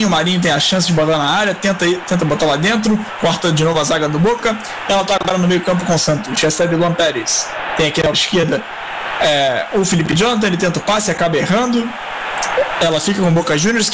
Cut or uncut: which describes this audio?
cut